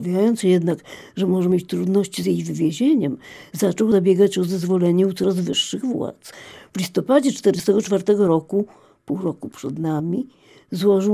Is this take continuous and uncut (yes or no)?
yes